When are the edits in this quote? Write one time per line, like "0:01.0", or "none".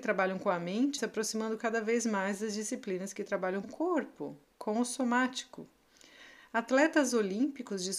0:01.0
0:03.6